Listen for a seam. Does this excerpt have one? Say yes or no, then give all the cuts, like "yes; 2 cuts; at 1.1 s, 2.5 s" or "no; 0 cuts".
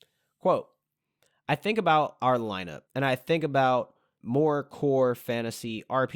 yes; 2 cuts; at 2.9 s, 4.2 s